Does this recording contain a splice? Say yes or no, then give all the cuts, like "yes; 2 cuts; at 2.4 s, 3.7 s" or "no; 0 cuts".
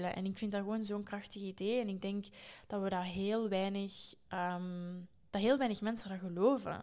no; 0 cuts